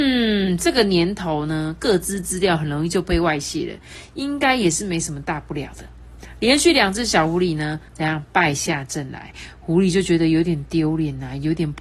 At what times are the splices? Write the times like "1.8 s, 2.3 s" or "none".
7.9 s

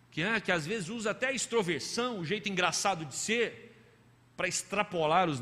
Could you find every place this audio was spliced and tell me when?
none

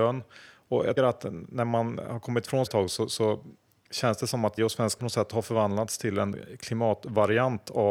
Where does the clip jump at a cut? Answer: 1.0 s, 2.7 s, 4.6 s, 5.0 s

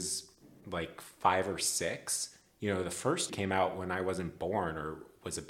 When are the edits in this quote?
3.3 s

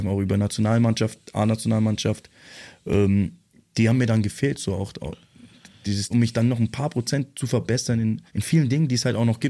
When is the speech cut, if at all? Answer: 6.1 s, 8.3 s

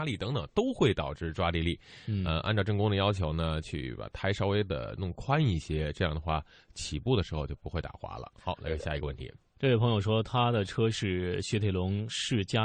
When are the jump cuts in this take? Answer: none

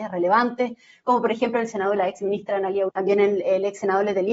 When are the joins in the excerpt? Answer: 2.0 s, 2.9 s

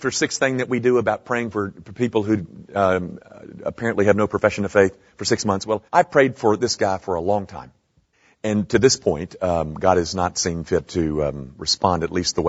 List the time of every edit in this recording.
5.9 s, 8.1 s

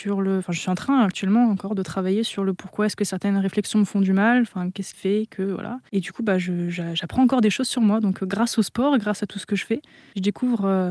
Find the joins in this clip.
4.9 s, 5.9 s

